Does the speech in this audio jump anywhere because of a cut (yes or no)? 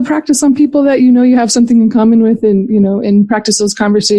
no